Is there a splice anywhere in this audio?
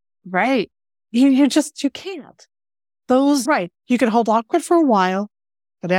yes; 1 cut; at 3.5 s

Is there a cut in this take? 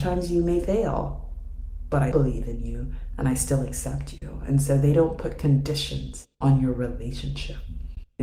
yes; 2 cuts; at 2.1 s, 6.3 s

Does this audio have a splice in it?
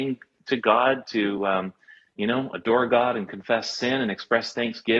no; 0 cuts

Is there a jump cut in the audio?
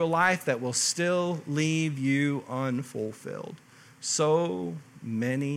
no; 0 cuts

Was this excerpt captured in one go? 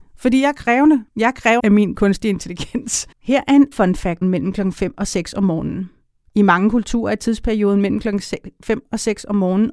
no; 5 cuts; at 1.1 s, 1.6 s, 3.1 s, 3.7 s, 4.2 s

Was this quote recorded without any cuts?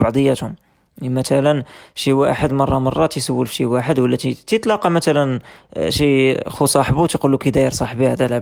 yes; 0 cuts

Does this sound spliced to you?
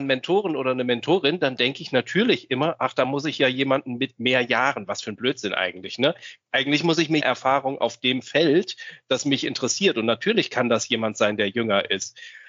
yes; 1 cut; at 7.2 s

